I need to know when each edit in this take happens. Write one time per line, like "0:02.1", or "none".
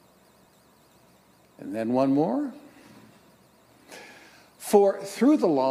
none